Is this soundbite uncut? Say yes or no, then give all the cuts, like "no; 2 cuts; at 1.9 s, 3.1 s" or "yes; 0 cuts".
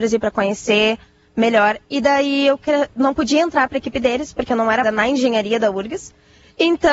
no; 1 cut; at 4.8 s